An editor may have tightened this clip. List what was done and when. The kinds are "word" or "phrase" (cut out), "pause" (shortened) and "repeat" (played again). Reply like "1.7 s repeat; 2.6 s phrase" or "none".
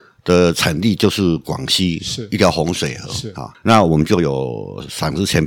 3.5 s pause